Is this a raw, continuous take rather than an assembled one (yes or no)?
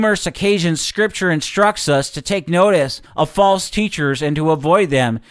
no